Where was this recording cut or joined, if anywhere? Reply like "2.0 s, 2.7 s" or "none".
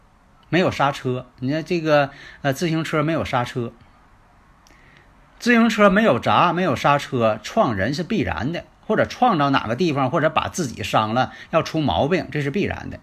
none